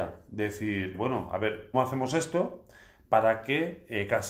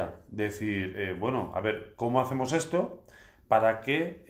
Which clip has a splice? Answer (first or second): first